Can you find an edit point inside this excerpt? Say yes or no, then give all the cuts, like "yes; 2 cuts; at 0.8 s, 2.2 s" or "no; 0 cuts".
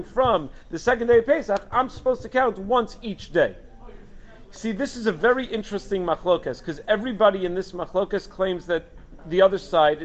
no; 0 cuts